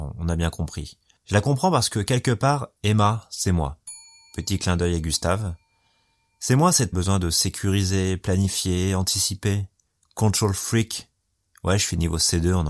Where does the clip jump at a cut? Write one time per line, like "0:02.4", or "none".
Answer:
0:02.8
0:06.9